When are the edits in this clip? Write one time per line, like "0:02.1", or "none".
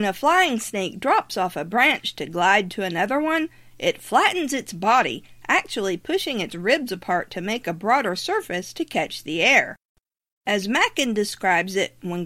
none